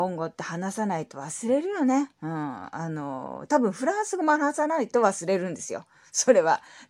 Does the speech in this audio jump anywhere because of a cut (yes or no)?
yes